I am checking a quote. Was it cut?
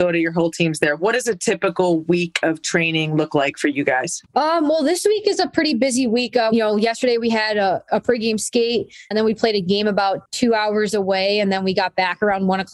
yes; 4 cuts; at 4.3 s, 6.5 s, 9.1 s, 10.3 s

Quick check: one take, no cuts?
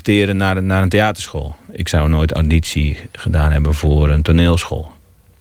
yes; 0 cuts

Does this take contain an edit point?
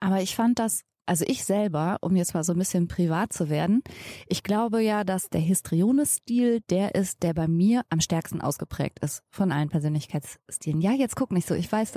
no; 0 cuts

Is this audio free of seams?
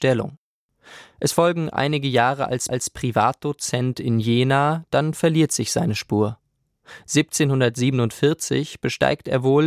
no; 1 cut; at 2.7 s

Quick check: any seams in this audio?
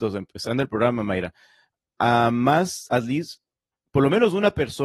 no; 0 cuts

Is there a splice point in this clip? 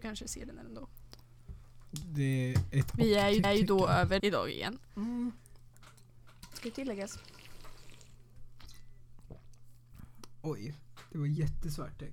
yes; 2 cuts; at 3.4 s, 4.2 s

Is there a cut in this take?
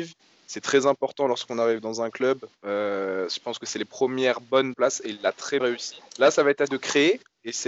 yes; 4 cuts; at 4.7 s, 5.6 s, 6.1 s, 6.7 s

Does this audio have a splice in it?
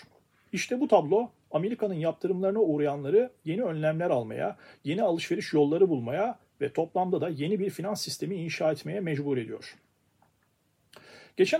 no; 0 cuts

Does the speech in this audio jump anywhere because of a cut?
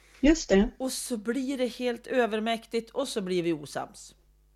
no; 0 cuts

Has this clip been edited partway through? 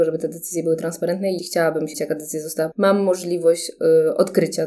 yes; 3 cuts; at 1.4 s, 1.9 s, 2.7 s

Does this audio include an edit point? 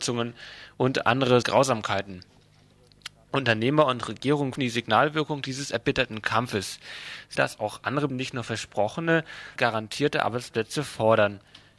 yes; 5 cuts; at 1.4 s, 4.6 s, 7.4 s, 8.1 s, 9.6 s

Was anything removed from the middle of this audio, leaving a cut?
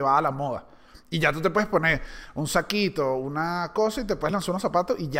no; 0 cuts

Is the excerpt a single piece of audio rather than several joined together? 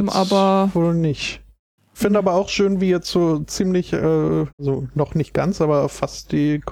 no; 1 cut; at 4.5 s

